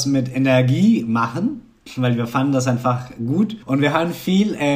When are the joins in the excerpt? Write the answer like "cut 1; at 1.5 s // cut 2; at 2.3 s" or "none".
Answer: cut 1; at 3.6 s